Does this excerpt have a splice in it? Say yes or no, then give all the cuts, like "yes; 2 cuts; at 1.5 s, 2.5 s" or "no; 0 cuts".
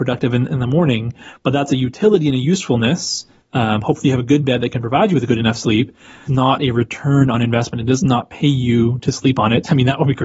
yes; 1 cut; at 6.3 s